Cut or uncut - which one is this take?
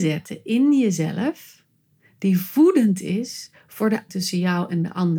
cut